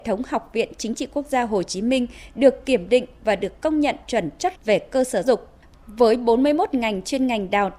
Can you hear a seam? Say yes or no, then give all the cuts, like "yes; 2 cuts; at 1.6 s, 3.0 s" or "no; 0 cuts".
yes; 3 cuts; at 4.0 s, 4.5 s, 5.2 s